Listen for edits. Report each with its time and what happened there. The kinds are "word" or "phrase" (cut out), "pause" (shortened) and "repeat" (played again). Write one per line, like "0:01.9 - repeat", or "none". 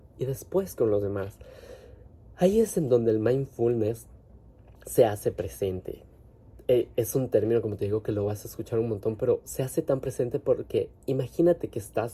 0:04.7 - pause